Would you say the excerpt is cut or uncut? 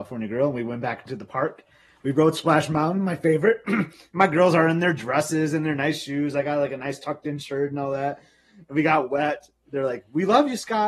uncut